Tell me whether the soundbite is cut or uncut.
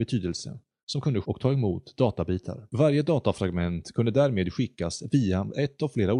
cut